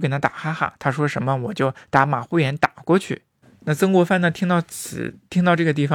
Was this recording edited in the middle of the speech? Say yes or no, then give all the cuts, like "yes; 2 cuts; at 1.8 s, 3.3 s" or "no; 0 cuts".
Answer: yes; 1 cut; at 3.4 s